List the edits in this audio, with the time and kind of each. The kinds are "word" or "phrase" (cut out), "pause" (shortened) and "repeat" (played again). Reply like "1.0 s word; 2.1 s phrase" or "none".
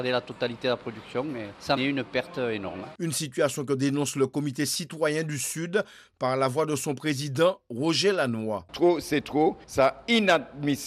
1.8 s phrase